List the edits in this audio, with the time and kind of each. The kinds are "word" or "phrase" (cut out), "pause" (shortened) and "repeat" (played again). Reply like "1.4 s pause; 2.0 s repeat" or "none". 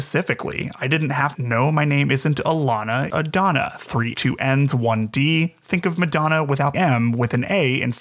1.3 s phrase; 3.1 s word; 4.1 s word; 6.7 s word